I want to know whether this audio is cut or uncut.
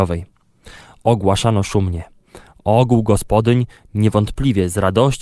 uncut